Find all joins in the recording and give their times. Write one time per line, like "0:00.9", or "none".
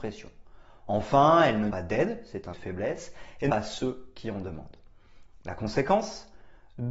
0:01.7
0:02.5
0:03.5